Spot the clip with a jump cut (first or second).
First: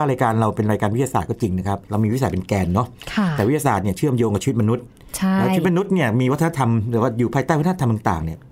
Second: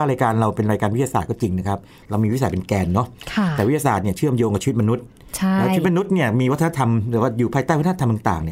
first